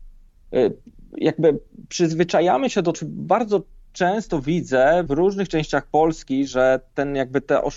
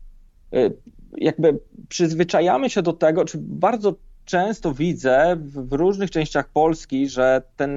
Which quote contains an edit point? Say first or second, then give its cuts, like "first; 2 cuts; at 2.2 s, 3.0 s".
first; 2 cuts; at 2.9 s, 5.1 s